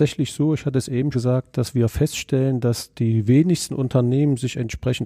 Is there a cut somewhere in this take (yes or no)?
yes